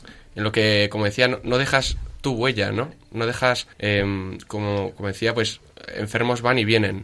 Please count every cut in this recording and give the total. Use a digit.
1